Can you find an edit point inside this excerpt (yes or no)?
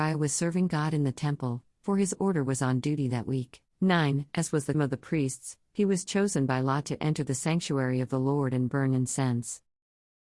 yes